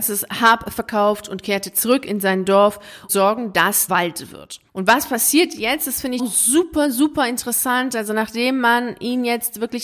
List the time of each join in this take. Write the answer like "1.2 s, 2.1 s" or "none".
3.1 s, 3.9 s, 4.7 s, 6.2 s